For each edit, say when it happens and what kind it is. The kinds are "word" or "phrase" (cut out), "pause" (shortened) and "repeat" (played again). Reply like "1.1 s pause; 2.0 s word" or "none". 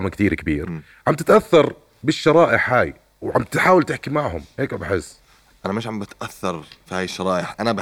none